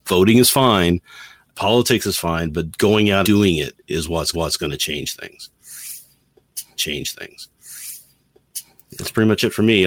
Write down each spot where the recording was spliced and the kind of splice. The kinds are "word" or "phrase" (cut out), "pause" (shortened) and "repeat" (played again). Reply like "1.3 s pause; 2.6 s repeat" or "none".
1.5 s word; 3.2 s word; 3.8 s pause; 4.3 s repeat; 6.8 s repeat